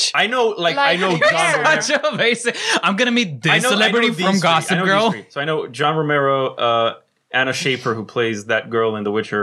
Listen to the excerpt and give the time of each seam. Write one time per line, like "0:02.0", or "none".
none